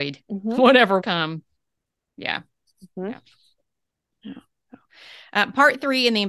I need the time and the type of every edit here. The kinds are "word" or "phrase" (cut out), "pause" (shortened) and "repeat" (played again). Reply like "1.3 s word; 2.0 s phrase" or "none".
1.0 s word